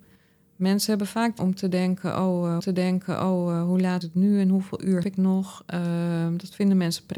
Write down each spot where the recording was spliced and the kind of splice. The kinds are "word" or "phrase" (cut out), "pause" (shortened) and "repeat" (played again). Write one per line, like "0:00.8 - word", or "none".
0:01.4 - word
0:02.6 - repeat
0:04.0 - word
0:05.0 - word